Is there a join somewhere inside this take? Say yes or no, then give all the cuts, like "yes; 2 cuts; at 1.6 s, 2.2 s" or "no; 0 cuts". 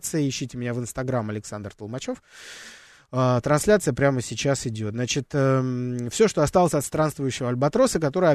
no; 0 cuts